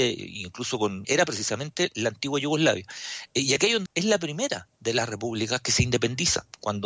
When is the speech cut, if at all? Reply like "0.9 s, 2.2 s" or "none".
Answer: 1.0 s, 3.9 s